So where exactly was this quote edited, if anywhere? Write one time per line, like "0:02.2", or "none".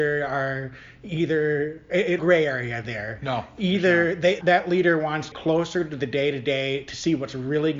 0:02.2
0:04.4
0:05.3